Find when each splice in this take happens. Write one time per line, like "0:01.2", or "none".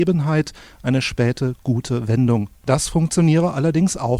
0:02.6